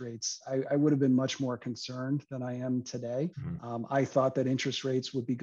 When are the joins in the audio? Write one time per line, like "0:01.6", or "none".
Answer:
0:03.3